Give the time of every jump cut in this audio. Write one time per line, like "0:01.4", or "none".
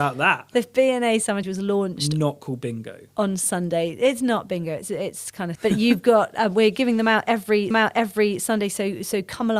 0:01.4
0:05.5
0:07.7